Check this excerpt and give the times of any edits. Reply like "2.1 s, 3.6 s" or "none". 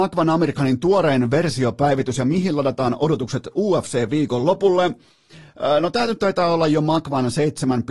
none